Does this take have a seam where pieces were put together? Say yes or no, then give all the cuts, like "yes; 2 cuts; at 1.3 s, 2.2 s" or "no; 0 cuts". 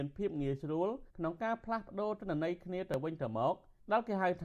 yes; 1 cut; at 1.1 s